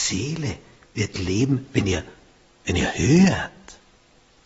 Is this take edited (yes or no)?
no